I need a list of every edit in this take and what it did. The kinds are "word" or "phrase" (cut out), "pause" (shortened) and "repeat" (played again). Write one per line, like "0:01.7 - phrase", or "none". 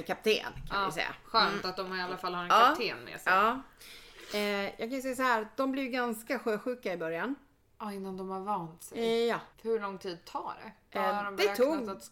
0:09.5 - pause